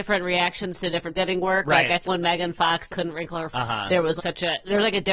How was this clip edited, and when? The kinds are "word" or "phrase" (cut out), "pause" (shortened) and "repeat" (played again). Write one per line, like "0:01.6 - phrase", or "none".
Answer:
0:01.1 - word
0:02.0 - word
0:02.9 - word
0:03.5 - word
0:04.2 - word